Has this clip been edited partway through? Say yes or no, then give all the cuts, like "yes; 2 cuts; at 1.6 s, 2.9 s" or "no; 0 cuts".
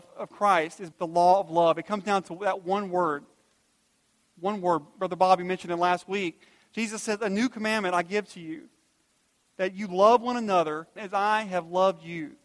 yes; 2 cuts; at 0.9 s, 11.0 s